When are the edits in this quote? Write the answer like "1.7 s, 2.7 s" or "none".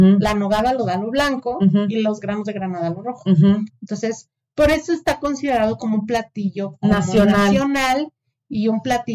none